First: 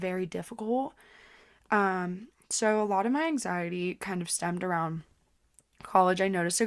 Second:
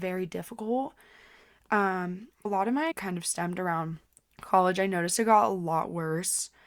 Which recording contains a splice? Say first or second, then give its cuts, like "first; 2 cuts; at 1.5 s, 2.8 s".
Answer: second; 3 cuts; at 2.4 s, 2.9 s, 4.1 s